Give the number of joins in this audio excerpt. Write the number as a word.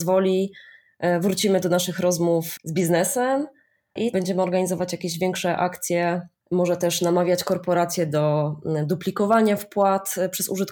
one